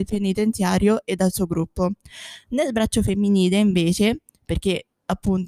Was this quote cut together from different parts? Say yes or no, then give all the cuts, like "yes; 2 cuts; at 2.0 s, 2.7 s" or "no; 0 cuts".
no; 0 cuts